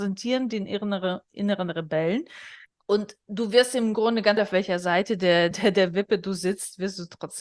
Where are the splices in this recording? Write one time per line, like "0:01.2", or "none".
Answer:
0:02.7
0:04.4
0:05.5